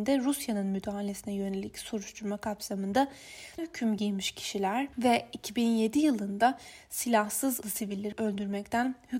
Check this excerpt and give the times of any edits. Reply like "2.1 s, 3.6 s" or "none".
3.6 s, 4.9 s, 7.6 s